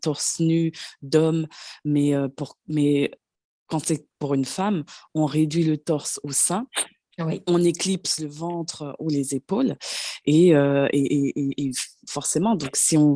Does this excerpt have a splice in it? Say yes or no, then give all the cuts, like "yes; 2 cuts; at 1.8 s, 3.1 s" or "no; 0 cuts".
no; 0 cuts